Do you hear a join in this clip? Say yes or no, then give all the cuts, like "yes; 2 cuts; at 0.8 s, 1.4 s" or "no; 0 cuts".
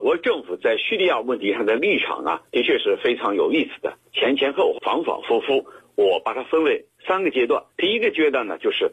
yes; 4 cuts; at 2.5 s, 4.1 s, 4.8 s, 7.7 s